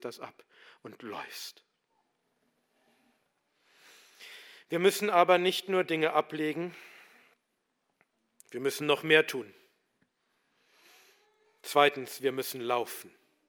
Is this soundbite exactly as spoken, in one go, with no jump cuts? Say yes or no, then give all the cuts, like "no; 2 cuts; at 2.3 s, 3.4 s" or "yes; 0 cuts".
yes; 0 cuts